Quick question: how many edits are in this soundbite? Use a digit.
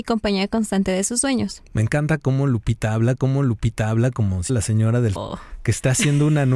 3